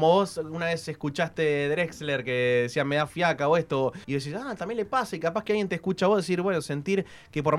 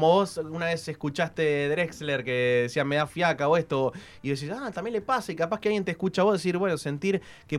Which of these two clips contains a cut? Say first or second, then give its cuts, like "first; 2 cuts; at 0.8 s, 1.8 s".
first; 1 cut; at 4.0 s